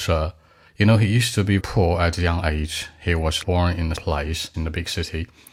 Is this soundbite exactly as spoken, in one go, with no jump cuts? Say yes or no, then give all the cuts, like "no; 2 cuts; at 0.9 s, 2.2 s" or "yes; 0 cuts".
no; 4 cuts; at 1.6 s, 3.4 s, 4.0 s, 4.5 s